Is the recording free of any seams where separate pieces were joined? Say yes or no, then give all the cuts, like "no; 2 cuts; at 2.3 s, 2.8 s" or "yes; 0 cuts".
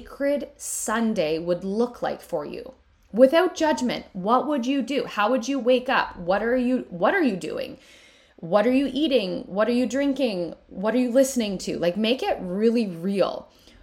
yes; 0 cuts